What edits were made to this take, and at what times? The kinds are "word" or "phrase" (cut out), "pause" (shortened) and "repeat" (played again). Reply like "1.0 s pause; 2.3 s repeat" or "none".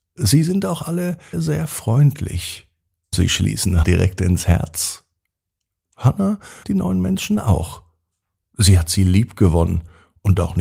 1.3 s word; 3.1 s word; 3.8 s word; 6.6 s word